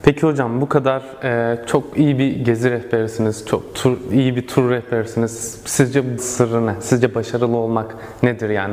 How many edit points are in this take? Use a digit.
1